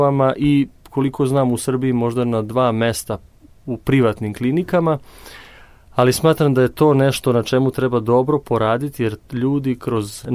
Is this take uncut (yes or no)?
yes